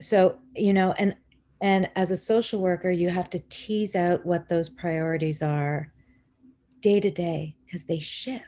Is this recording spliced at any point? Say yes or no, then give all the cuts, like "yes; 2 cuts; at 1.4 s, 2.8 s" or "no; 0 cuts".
no; 0 cuts